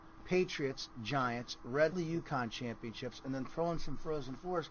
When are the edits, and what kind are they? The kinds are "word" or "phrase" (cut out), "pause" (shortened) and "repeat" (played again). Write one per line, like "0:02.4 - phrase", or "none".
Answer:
0:01.9 - phrase

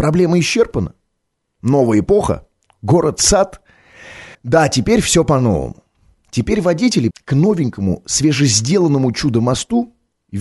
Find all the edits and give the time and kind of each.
0:04.3 - pause
0:07.1 - word

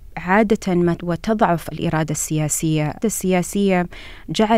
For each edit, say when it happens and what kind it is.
0:01.0 - word
0:01.7 - word
0:03.0 - word

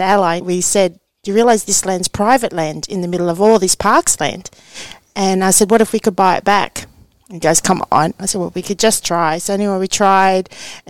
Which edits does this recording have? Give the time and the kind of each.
none

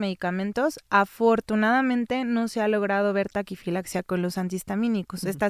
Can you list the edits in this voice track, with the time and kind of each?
none

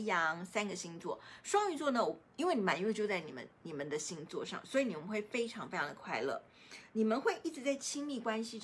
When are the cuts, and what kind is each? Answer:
none

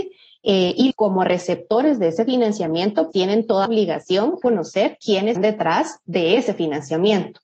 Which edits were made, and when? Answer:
0:00.9 - phrase
0:03.1 - word
0:03.7 - word
0:04.4 - phrase
0:05.4 - word

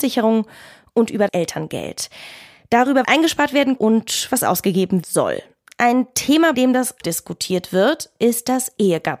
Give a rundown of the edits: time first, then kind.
0:01.3 - word
0:03.0 - word
0:03.8 - word
0:05.0 - word
0:06.5 - word
0:07.0 - word

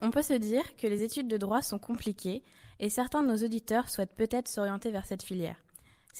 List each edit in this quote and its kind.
none

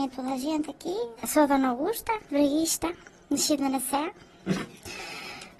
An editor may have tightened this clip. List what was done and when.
0:01.2 - pause
0:02.3 - word

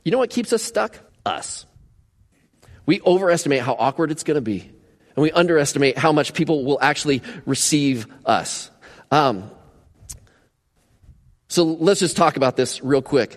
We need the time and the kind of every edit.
0:01.1 - pause

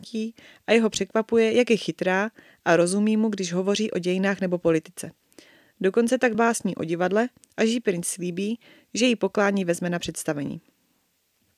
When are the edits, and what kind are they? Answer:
0:06.3 - word

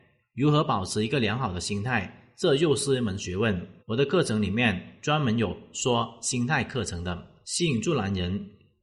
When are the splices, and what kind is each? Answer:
0:03.8 - pause
0:07.4 - pause

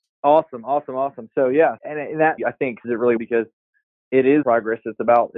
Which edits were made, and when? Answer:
0:01.8 - word
0:02.4 - word
0:02.8 - word
0:03.2 - word
0:04.4 - word

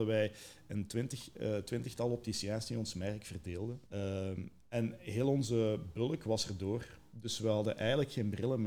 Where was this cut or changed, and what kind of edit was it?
0:03.9 - pause

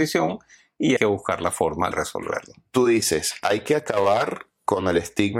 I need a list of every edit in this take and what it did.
0:01.0 - word
0:01.9 - word

